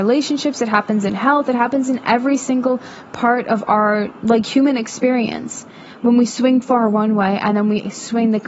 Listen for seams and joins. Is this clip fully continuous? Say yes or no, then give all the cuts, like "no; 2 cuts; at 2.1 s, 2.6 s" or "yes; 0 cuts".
no; 2 cuts; at 4.2 s, 6.6 s